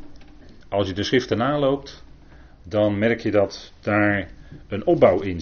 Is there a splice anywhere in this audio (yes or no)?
no